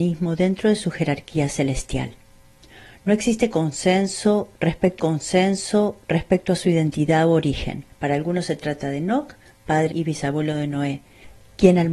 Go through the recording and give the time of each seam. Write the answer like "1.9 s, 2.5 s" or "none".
5.0 s, 7.9 s, 9.9 s